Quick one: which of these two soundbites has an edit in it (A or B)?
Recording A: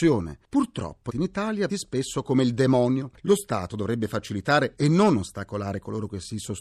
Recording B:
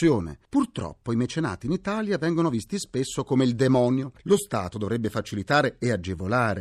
A